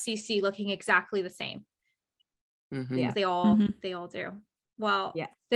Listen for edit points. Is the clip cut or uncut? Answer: uncut